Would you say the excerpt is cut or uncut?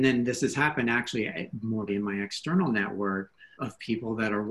cut